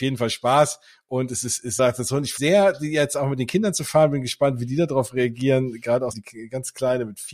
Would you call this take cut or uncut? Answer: cut